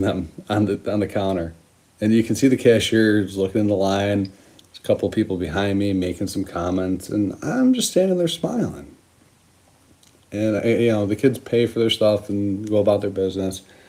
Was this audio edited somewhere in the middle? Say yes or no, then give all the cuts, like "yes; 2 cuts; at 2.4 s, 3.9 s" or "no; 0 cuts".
no; 0 cuts